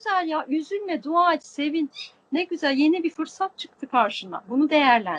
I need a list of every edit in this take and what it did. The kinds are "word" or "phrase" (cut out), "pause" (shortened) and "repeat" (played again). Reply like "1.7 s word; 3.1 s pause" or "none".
none